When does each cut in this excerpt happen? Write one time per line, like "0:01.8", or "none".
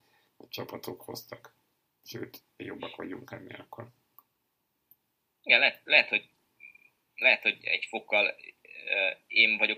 none